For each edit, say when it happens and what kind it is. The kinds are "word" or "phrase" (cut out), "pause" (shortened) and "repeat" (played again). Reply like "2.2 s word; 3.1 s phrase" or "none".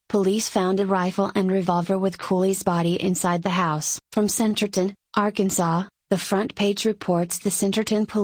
4.1 s pause